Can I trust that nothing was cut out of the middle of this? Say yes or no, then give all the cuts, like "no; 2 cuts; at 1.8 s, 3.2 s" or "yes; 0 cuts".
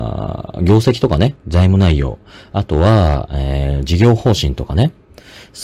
yes; 0 cuts